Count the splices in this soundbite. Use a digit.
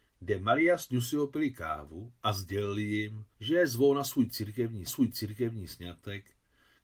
2